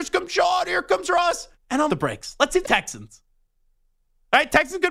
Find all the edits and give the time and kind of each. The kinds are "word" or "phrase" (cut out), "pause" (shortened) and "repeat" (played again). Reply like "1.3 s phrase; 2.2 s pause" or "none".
1.5 s pause; 1.9 s phrase; 2.6 s phrase